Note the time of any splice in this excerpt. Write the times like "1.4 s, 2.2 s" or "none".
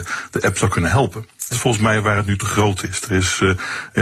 1.5 s